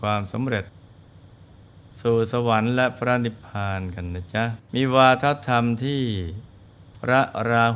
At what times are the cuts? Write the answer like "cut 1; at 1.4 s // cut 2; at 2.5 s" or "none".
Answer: cut 1; at 4.6 s